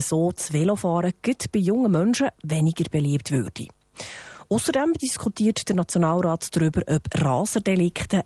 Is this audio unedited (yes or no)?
yes